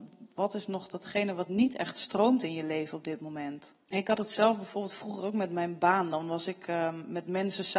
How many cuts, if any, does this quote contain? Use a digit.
0